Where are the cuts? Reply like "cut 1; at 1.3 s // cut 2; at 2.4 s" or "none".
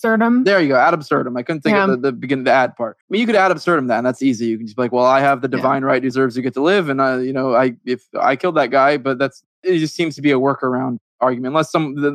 cut 1; at 3.0 s // cut 2; at 9.5 s

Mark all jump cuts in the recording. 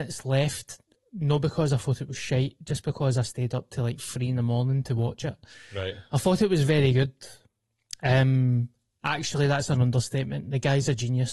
none

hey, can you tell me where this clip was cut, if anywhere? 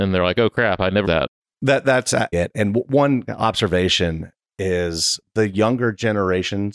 cut 1; at 1.0 s // cut 2; at 2.3 s

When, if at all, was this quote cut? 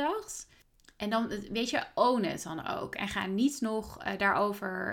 none

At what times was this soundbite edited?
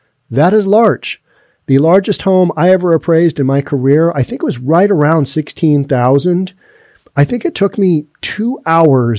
none

